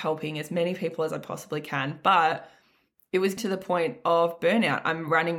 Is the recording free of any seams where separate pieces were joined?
no; 1 cut; at 3.4 s

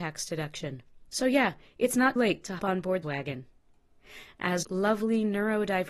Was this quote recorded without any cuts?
no; 5 cuts; at 1.1 s, 2.2 s, 2.6 s, 3.0 s, 4.6 s

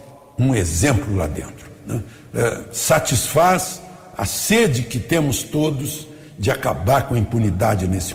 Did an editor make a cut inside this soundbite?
no; 0 cuts

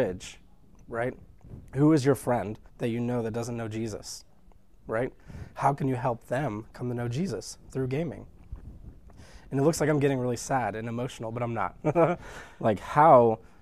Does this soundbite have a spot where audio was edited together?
yes; 2 cuts; at 1.7 s, 2.7 s

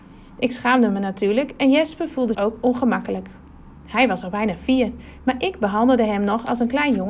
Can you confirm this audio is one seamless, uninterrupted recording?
no; 1 cut; at 2.3 s

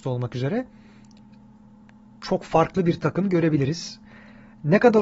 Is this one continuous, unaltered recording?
yes; 0 cuts

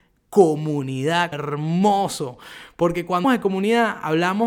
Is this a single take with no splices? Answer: no; 2 cuts; at 1.3 s, 3.2 s

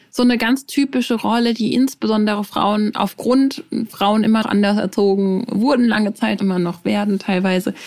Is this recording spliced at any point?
yes; 3 cuts; at 3.9 s, 4.4 s, 6.4 s

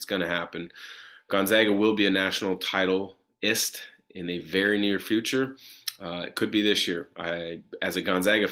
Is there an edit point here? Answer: no; 0 cuts

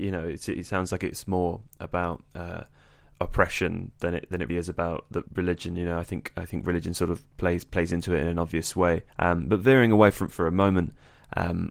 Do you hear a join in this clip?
yes; 4 cuts; at 4.5 s, 5.3 s, 9.1 s, 10.3 s

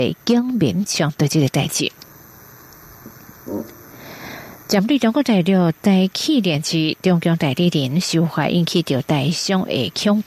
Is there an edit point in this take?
no; 0 cuts

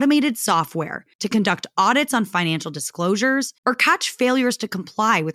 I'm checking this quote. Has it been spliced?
yes; 2 cuts; at 1.1 s, 3.6 s

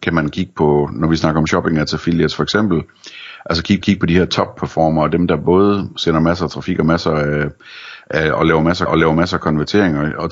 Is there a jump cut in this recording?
yes; 2 cuts; at 3.8 s, 8.9 s

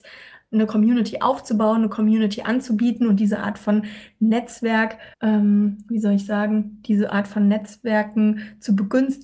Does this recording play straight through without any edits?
no; 1 cut; at 5.1 s

